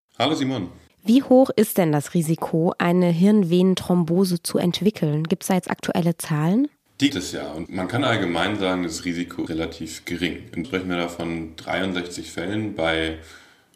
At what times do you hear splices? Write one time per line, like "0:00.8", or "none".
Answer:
0:07.1
0:07.7
0:09.5
0:10.6